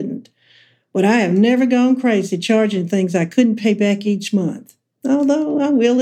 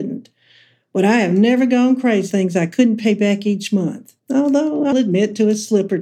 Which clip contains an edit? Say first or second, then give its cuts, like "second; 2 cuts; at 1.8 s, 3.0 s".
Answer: second; 3 cuts; at 2.3 s, 4.2 s, 4.9 s